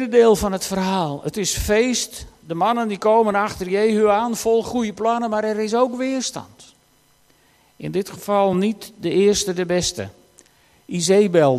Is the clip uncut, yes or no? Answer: yes